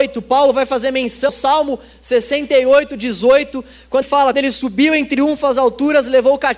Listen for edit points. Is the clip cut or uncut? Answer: cut